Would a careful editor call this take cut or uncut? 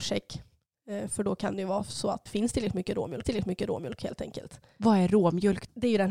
cut